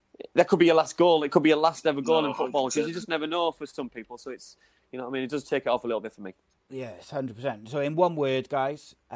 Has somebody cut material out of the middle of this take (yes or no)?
no